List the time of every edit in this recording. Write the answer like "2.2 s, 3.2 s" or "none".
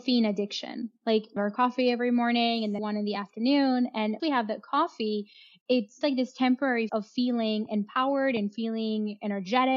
1.4 s, 2.8 s, 4.2 s, 6.0 s, 6.9 s